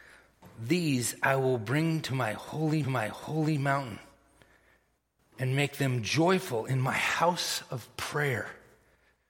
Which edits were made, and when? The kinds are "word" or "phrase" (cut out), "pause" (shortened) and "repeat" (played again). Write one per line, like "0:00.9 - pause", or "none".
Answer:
0:02.8 - repeat